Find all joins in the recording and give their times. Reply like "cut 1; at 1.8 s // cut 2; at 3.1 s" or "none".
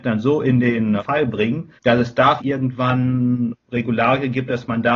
cut 1; at 1.0 s // cut 2; at 1.8 s // cut 3; at 2.4 s // cut 4; at 3.6 s